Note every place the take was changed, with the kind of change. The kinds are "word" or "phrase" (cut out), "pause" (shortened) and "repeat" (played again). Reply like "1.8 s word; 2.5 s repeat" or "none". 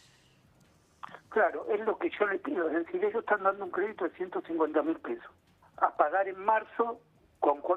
5.6 s pause